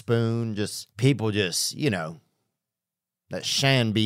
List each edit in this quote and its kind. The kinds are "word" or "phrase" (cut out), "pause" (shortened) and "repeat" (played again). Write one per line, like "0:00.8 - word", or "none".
0:00.9 - pause